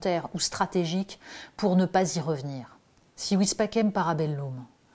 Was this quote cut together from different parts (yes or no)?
no